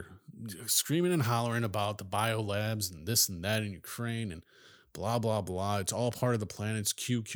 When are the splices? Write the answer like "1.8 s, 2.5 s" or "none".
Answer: none